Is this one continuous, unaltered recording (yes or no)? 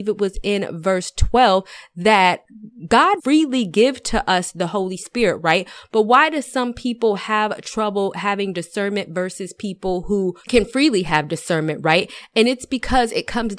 no